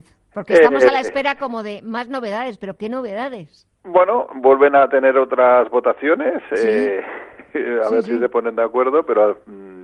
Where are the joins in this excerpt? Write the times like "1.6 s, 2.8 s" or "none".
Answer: 3.8 s